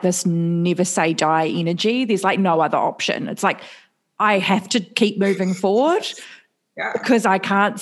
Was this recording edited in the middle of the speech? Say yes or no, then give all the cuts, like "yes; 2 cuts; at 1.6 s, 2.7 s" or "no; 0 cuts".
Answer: no; 0 cuts